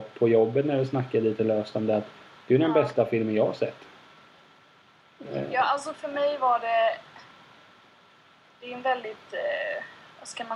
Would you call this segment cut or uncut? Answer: uncut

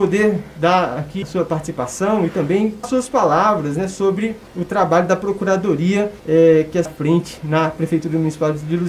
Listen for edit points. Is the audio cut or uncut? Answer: cut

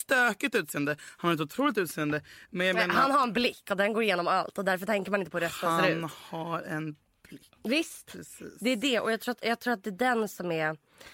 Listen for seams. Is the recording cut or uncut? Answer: uncut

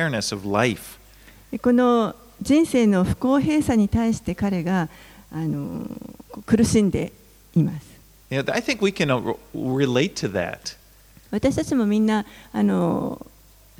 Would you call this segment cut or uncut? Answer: uncut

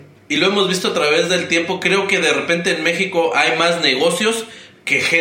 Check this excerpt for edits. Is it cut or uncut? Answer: uncut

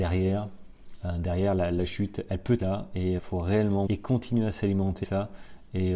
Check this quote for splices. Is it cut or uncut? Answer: cut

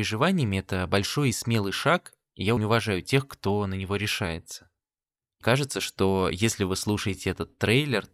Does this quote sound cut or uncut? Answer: cut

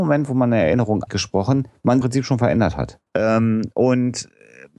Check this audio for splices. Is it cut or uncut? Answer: cut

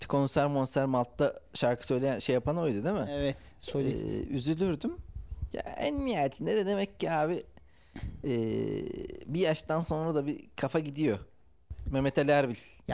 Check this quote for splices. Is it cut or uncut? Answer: uncut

